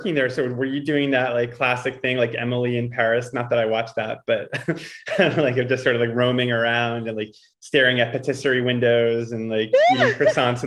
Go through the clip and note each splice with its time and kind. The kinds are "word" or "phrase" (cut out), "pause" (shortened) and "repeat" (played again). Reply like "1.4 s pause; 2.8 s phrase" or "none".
none